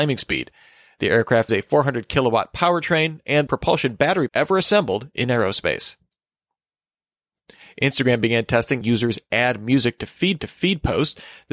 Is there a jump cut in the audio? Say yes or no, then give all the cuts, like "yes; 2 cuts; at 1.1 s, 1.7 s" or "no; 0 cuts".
yes; 5 cuts; at 1.5 s, 3.5 s, 4.3 s, 8.8 s, 10.4 s